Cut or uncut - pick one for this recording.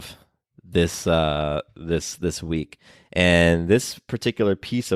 uncut